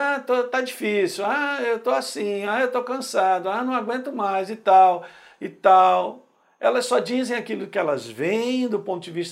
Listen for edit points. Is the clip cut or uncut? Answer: uncut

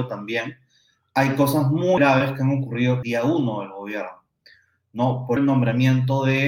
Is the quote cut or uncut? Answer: cut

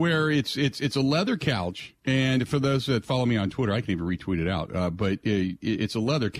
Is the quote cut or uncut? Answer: cut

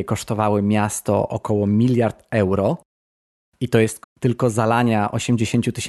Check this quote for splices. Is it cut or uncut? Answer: cut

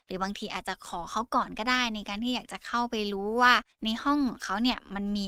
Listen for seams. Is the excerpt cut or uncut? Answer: cut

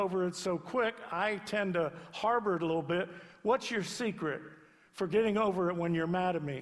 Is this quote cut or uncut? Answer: uncut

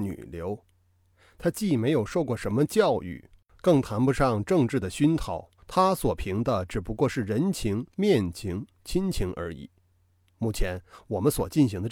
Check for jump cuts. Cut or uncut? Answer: cut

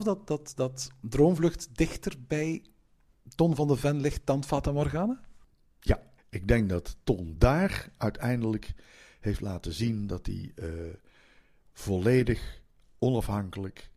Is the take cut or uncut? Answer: uncut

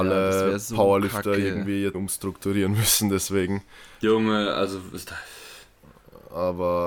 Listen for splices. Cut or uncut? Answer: cut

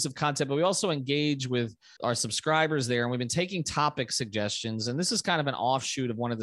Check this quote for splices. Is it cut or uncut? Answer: cut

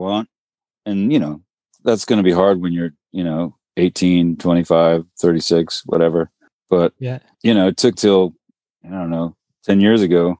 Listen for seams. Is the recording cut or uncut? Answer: cut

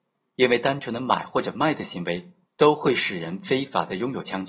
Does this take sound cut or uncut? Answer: uncut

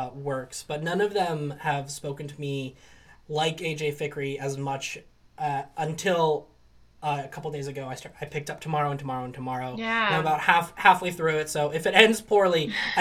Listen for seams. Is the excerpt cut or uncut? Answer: uncut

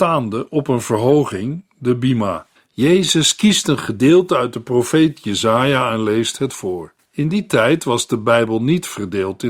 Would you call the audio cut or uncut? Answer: cut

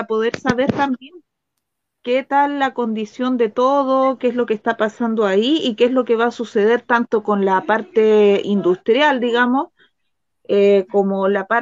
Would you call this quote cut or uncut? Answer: uncut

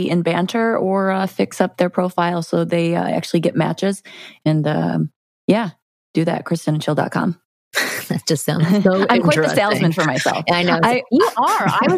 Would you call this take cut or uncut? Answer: uncut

